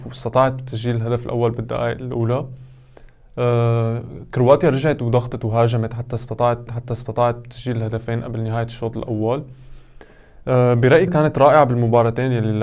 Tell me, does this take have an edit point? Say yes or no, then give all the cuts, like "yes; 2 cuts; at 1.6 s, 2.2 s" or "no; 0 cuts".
yes; 2 cuts; at 6.7 s, 11.1 s